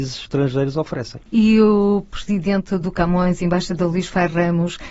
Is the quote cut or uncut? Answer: uncut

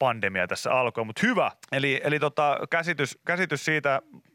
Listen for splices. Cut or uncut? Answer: cut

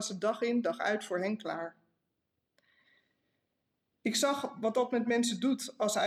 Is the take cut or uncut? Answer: uncut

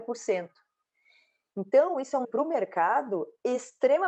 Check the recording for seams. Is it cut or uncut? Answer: cut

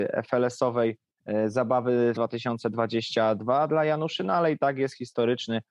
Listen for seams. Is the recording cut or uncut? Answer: cut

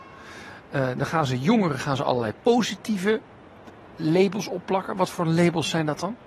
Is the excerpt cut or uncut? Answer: cut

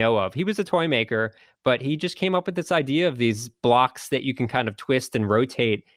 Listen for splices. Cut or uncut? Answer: uncut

